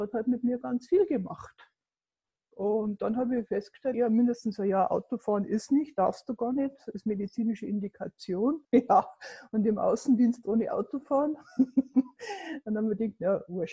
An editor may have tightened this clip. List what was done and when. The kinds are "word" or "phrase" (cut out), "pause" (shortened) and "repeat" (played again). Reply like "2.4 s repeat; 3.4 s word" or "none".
3.9 s word; 8.6 s pause